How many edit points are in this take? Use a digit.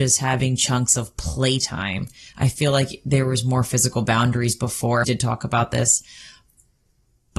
1